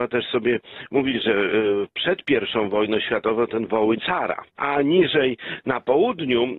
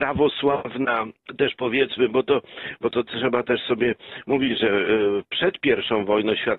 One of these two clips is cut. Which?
first; 1 cut; at 4.0 s

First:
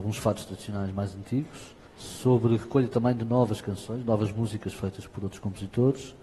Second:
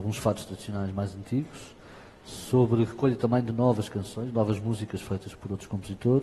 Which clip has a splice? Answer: first; 1 cut; at 1.9 s

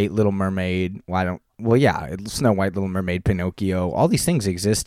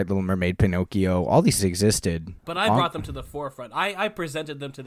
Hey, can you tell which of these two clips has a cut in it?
second; 2 cuts; at 1.6 s, 2.4 s

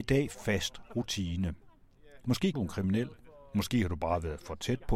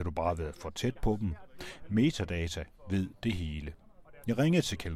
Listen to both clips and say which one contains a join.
first; 1 cut; at 2.5 s

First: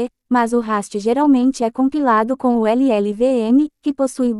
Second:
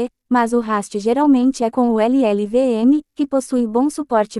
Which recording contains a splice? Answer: second; 1 cut; at 1.7 s

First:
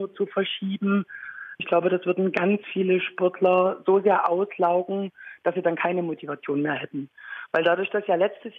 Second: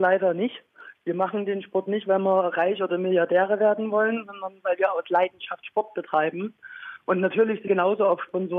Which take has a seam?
second; 1 cut; at 7.7 s

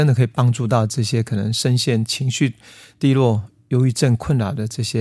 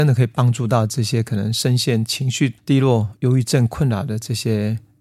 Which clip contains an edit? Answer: second; 2 cuts; at 2.6 s, 3.2 s

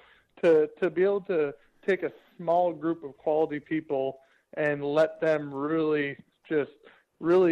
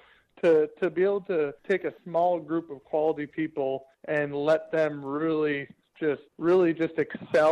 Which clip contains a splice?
second; 4 cuts; at 1.6 s, 2.0 s, 3.9 s, 6.3 s

